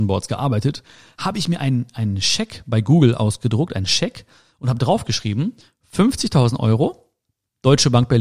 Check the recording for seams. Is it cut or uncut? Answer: uncut